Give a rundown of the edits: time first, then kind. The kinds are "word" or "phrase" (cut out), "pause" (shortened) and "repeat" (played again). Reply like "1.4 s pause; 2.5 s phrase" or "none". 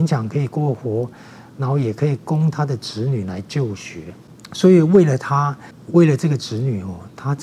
5.9 s word